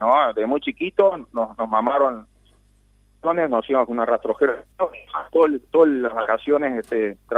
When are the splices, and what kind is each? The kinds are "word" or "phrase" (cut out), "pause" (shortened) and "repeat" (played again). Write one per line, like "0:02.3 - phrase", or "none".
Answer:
0:04.7 - pause
0:05.7 - pause